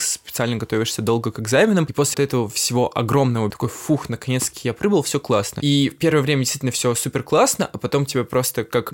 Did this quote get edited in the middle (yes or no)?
yes